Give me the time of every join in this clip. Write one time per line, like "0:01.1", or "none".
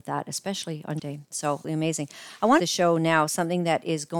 0:01.0
0:01.6
0:02.6